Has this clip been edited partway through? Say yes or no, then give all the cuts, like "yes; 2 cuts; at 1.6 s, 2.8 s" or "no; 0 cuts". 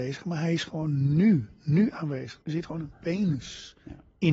yes; 1 cut; at 2.4 s